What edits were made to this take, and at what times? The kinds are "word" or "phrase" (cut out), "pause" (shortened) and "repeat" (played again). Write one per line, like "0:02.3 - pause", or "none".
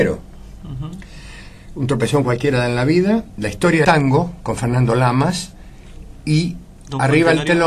0:03.8 - word